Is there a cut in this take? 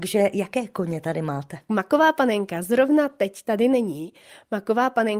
no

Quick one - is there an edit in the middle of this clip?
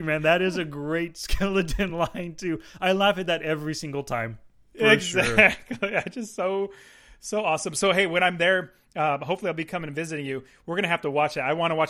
no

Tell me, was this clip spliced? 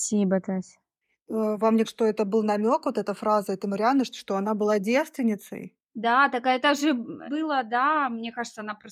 yes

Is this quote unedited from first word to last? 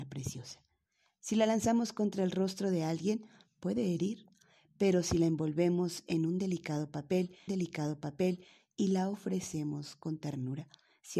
no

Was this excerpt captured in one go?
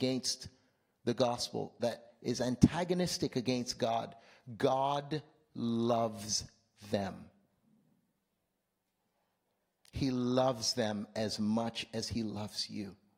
yes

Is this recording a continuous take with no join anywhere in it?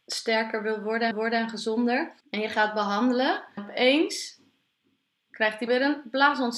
no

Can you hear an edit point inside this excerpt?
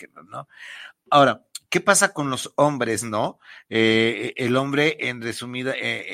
no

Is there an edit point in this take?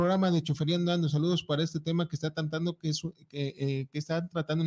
no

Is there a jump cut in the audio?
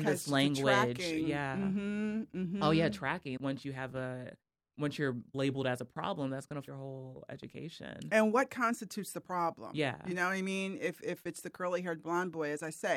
yes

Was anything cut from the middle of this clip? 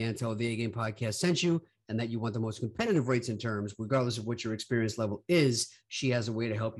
no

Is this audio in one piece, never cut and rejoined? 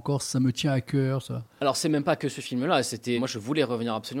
no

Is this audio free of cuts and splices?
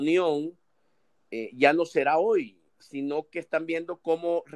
no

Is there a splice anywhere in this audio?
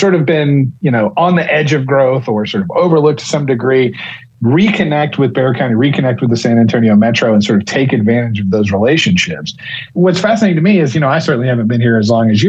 no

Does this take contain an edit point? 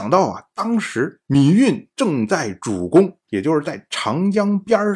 yes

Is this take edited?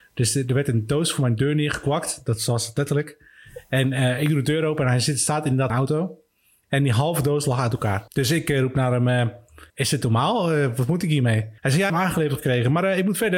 yes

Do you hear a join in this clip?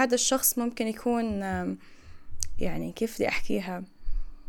no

